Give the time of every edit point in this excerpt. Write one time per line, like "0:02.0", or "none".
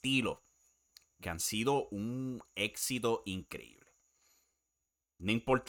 0:01.2

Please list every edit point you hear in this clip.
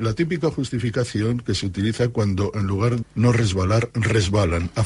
0:03.0

